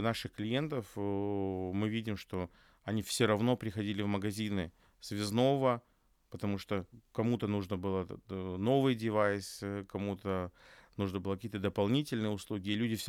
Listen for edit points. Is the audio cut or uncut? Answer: uncut